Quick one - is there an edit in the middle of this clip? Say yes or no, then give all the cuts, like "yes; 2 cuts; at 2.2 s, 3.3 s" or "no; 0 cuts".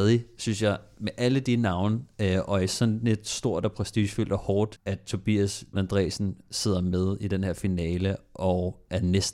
yes; 2 cuts; at 4.8 s, 5.7 s